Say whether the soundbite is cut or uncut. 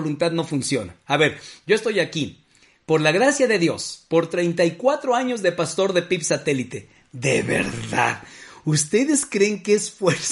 uncut